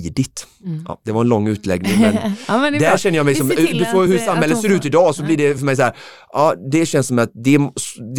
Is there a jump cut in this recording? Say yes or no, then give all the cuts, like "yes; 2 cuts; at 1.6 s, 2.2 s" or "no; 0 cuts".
no; 0 cuts